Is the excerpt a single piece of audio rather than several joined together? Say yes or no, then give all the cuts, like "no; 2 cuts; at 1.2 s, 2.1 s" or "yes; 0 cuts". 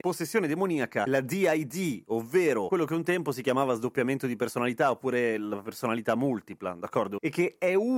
yes; 0 cuts